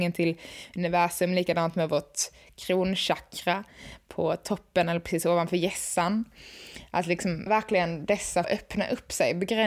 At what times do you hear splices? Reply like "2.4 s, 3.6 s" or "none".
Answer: 7.5 s, 8.4 s